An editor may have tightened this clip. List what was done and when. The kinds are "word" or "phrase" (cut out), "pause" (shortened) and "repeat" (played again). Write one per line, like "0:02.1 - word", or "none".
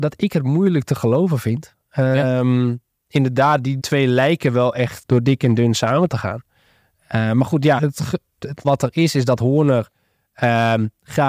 0:03.8 - word
0:05.0 - word
0:07.8 - word
0:08.6 - word